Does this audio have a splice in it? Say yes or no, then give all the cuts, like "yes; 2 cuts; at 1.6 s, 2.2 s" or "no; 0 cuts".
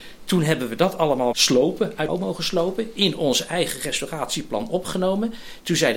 yes; 2 cuts; at 1.3 s, 2.1 s